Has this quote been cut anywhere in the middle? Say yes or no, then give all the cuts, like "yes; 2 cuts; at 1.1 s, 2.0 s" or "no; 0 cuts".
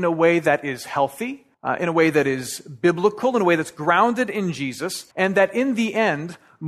yes; 2 cuts; at 1.5 s, 5.1 s